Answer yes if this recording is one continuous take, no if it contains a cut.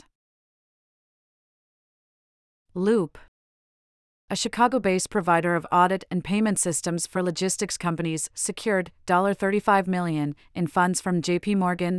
yes